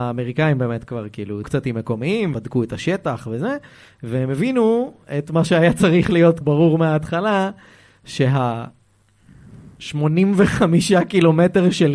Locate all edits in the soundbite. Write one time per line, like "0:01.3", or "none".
0:01.4
0:02.3
0:06.4